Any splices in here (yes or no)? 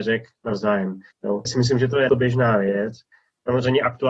yes